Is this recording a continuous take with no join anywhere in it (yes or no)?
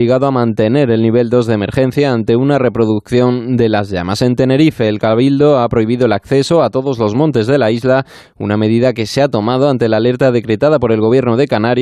yes